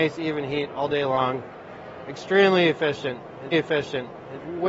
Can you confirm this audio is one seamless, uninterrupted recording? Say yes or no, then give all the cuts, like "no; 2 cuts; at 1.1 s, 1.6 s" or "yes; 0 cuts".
no; 1 cut; at 3.5 s